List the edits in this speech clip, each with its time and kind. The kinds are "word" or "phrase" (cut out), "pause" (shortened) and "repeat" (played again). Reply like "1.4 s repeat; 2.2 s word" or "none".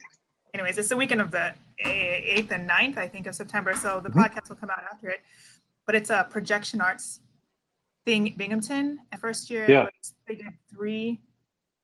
8.4 s word; 9.2 s word